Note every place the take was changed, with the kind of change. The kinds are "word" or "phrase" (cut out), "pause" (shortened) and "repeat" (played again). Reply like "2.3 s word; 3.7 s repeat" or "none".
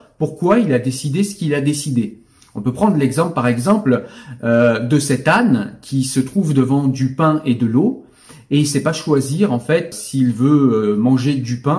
9.9 s word